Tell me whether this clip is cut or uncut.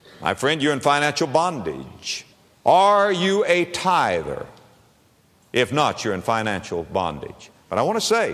cut